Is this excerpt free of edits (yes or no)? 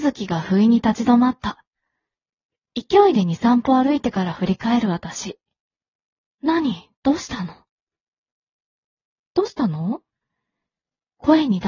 yes